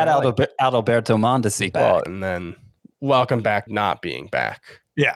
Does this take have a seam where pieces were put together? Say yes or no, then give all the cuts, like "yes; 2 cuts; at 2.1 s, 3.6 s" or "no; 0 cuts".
yes; 3 cuts; at 1.7 s, 2.1 s, 3.7 s